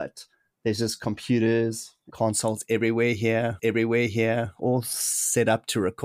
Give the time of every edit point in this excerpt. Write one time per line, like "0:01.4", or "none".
0:02.1
0:03.6